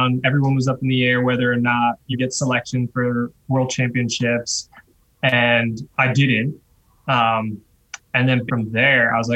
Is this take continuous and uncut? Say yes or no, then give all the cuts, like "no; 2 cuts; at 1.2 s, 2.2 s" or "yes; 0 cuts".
no; 4 cuts; at 2.1 s, 5.9 s, 8.0 s, 8.5 s